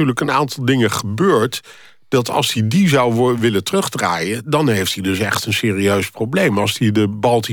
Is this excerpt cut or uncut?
uncut